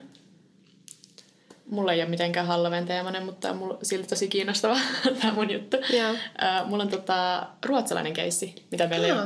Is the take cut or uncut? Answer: uncut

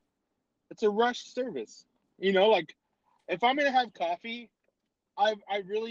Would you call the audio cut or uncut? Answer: uncut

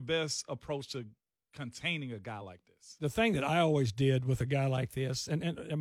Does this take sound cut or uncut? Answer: uncut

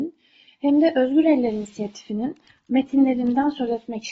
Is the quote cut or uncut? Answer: uncut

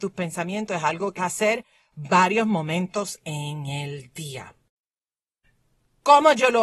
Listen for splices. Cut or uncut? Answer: cut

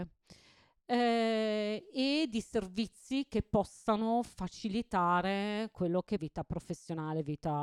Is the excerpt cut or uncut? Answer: cut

